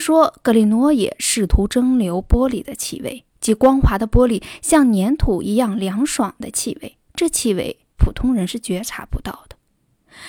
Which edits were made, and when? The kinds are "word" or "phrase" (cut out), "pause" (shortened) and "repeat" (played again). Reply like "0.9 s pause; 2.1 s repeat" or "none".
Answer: 3.3 s pause; 7.1 s pause; 7.9 s pause